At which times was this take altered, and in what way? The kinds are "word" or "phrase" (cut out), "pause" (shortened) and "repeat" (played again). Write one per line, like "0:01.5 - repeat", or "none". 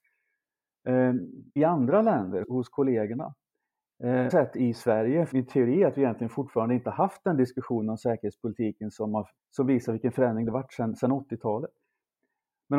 0:01.6 - word
0:02.4 - word
0:04.3 - phrase
0:05.3 - word
0:09.4 - pause